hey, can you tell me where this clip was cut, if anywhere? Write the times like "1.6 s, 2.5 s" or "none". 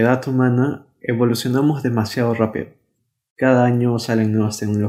none